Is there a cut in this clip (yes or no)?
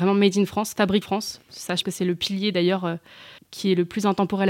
yes